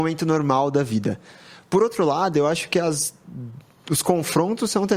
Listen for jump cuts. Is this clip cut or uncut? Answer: uncut